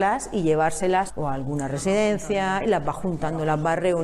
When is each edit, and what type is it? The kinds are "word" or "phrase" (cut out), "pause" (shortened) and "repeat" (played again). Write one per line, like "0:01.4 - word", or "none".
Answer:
0:01.1 - word